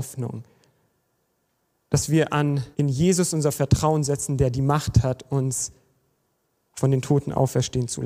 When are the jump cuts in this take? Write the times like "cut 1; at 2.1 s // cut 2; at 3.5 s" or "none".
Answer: cut 1; at 2.7 s